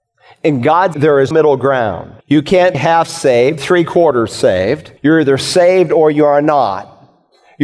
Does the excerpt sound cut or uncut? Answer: cut